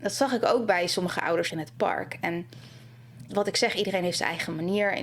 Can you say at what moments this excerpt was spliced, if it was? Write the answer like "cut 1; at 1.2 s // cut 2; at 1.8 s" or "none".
cut 1; at 1.5 s // cut 2; at 3.3 s